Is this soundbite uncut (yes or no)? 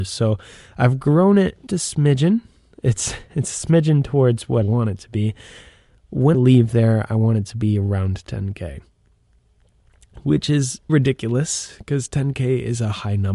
no